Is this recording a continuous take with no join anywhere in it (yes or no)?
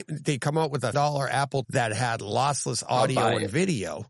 no